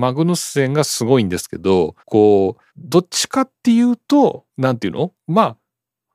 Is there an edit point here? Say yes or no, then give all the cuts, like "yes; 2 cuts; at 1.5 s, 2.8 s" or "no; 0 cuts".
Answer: yes; 4 cuts; at 2.0 s, 2.7 s, 4.5 s, 5.2 s